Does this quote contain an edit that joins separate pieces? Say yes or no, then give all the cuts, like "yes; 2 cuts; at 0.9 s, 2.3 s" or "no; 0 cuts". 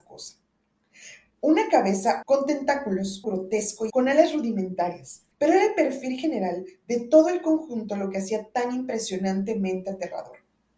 yes; 4 cuts; at 2.2 s, 3.2 s, 3.9 s, 5.3 s